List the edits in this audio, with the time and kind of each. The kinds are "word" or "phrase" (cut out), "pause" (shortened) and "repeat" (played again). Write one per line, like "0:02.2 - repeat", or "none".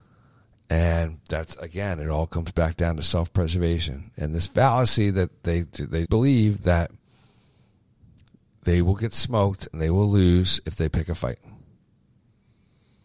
0:06.0 - word